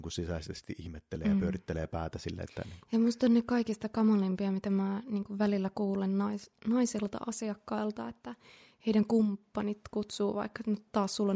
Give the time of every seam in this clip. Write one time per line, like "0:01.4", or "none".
none